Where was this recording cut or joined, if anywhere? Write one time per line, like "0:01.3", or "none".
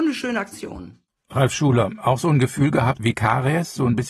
0:03.0